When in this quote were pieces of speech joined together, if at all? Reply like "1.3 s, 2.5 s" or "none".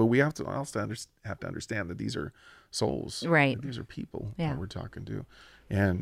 none